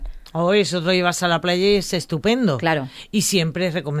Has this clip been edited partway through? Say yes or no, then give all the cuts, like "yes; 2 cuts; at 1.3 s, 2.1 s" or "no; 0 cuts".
no; 0 cuts